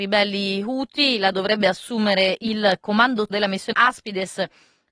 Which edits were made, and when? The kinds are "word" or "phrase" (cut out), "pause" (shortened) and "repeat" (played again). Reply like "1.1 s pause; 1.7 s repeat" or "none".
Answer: 1.3 s word; 3.3 s word; 3.7 s word